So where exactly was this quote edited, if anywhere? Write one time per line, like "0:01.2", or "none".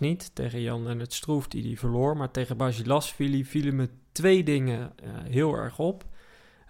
none